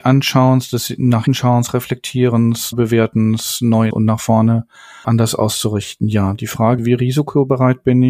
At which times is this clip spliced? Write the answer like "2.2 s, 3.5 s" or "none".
1.3 s, 2.7 s, 3.9 s, 5.0 s, 6.8 s